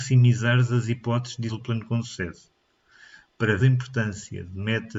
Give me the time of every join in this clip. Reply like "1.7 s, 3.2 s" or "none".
1.5 s, 3.6 s